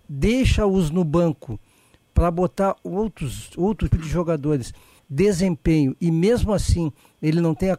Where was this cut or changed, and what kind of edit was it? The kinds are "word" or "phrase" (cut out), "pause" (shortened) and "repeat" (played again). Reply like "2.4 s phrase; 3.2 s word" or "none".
3.9 s word; 5.0 s phrase